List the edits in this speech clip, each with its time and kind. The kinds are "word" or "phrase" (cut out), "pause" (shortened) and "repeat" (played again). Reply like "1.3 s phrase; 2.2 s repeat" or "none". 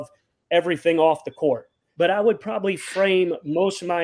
none